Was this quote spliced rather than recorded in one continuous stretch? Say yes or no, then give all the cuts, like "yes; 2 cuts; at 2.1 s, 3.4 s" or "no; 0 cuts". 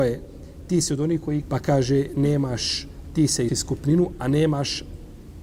yes; 2 cuts; at 1.4 s, 3.5 s